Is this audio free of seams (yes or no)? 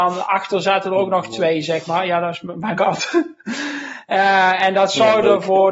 no